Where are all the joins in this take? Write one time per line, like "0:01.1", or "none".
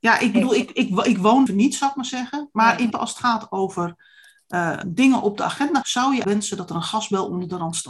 0:01.5
0:02.9
0:04.8
0:05.8
0:06.2